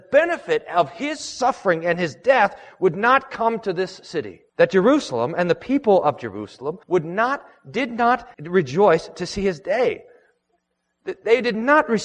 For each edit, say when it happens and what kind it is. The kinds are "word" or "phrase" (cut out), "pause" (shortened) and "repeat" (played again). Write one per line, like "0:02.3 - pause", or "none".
0:04.5 - pause
0:06.8 - pause
0:08.3 - pause